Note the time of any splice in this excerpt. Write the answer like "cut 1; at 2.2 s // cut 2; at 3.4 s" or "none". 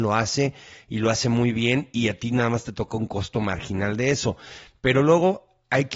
none